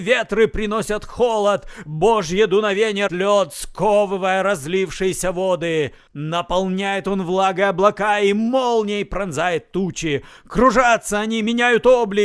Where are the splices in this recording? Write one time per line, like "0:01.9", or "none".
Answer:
0:03.1